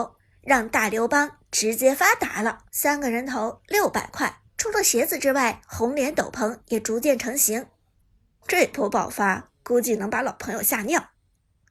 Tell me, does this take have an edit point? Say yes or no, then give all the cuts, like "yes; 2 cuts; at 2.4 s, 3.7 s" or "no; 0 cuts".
yes; 3 cuts; at 2.7 s, 4.5 s, 7.9 s